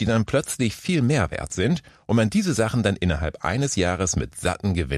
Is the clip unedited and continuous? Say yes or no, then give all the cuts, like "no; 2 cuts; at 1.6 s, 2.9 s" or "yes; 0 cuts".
yes; 0 cuts